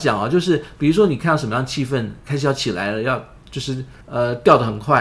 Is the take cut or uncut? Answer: cut